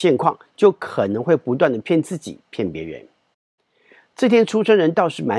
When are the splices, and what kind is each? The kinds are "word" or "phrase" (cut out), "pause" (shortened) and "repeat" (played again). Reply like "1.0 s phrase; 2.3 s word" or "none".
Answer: none